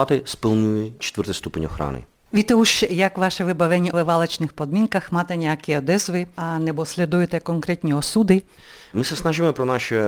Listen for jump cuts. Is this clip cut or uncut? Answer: cut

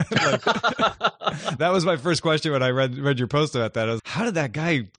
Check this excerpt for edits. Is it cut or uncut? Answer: cut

